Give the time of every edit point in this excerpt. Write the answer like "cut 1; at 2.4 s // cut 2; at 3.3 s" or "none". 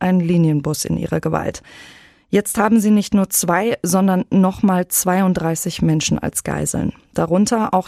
none